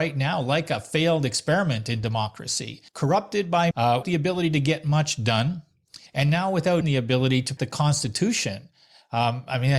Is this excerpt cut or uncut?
cut